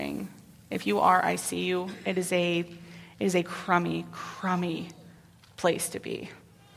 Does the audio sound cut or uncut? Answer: uncut